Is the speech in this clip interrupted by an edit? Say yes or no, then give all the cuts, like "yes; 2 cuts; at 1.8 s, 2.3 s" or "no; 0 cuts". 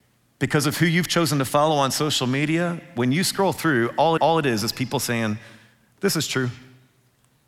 yes; 1 cut; at 4.2 s